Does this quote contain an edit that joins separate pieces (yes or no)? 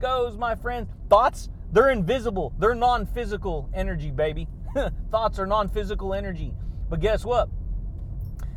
no